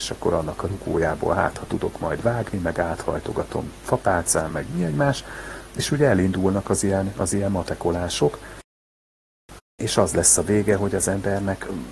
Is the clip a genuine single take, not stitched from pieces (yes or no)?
yes